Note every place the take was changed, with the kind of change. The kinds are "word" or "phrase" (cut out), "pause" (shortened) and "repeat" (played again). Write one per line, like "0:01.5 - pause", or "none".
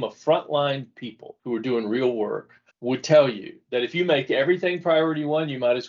0:01.4 - pause
0:02.7 - pause

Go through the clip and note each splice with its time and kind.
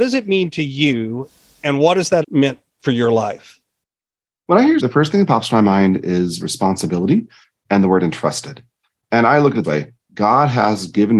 0:02.2 - word
0:04.8 - word
0:09.6 - word

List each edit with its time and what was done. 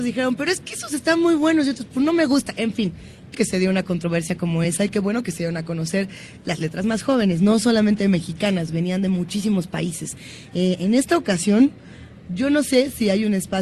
0:03.3 - word

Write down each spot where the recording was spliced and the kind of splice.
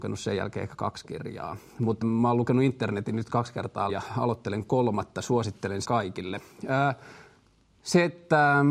0:02.0 - word
0:03.9 - word
0:05.8 - word

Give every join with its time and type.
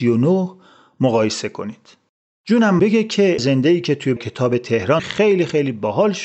0:02.8 - word
0:03.4 - word
0:04.2 - word
0:05.0 - word

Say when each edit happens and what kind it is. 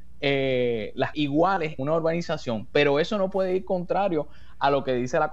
0:01.1 - phrase
0:01.8 - word

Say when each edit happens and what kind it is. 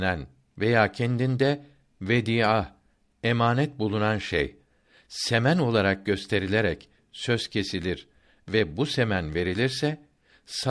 none

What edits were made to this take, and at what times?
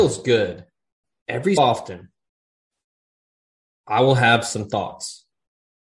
0:01.6 - word

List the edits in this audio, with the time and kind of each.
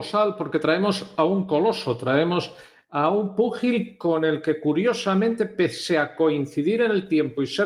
none

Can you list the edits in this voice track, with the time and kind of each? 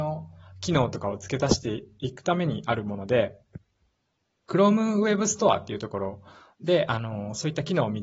none

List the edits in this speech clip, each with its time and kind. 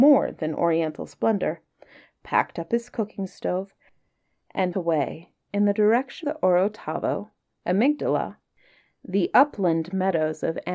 0:04.7 - word
0:06.2 - word

